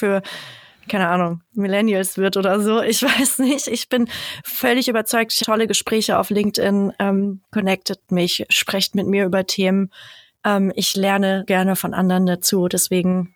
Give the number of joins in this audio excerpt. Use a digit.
2